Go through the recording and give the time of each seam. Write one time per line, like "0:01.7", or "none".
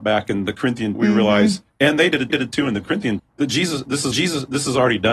0:00.9
0:02.3
0:03.2
0:04.1